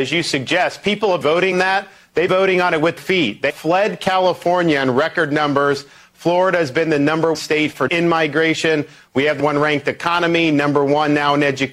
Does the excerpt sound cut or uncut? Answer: cut